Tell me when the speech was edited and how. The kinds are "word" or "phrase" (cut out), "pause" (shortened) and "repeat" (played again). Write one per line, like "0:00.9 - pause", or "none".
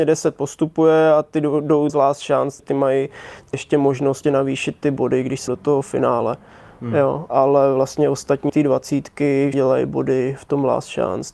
0:01.9 - word
0:02.6 - word
0:03.5 - word
0:04.2 - word
0:05.5 - word
0:07.3 - word
0:08.5 - word
0:09.5 - word